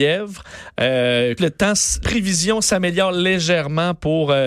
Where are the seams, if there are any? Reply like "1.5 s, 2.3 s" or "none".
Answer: 1.4 s, 2.0 s

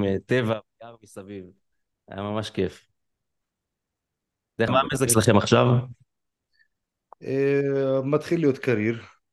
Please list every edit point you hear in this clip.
4.7 s, 5.1 s

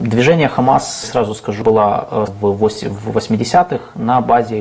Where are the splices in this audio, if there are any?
1.0 s, 1.6 s, 2.3 s

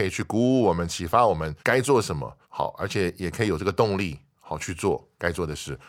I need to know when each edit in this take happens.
1.6 s, 2.4 s

